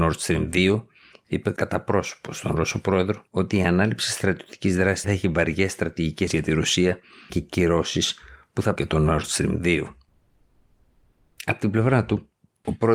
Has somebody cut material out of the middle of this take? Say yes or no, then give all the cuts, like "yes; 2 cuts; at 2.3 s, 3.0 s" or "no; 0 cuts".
yes; 5 cuts; at 3.3 s, 5.0 s, 6.3 s, 7.3 s, 8.8 s